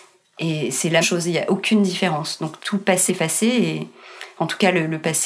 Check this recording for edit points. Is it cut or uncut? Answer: cut